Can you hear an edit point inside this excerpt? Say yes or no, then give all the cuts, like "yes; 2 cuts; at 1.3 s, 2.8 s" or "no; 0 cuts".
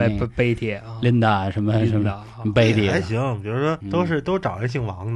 yes; 1 cut; at 3.8 s